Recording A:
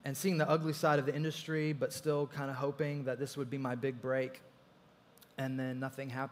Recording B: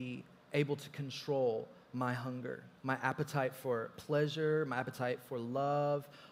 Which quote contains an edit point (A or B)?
B